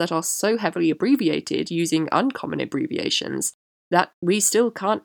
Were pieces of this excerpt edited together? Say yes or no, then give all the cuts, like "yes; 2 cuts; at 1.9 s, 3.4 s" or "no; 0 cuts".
no; 0 cuts